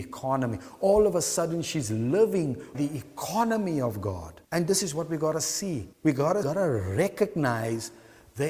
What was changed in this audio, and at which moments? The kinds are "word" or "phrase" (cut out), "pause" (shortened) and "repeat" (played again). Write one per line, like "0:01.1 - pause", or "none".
0:02.7 - word
0:04.4 - pause
0:05.9 - pause
0:06.4 - phrase